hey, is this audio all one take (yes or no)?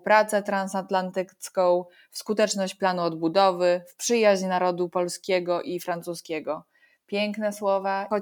yes